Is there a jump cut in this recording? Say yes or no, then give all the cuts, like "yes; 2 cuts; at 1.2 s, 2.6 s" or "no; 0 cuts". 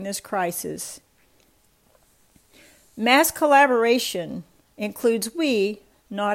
no; 0 cuts